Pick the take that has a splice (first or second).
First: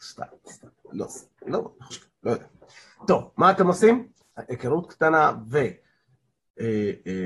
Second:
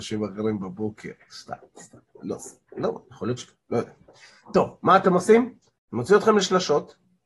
first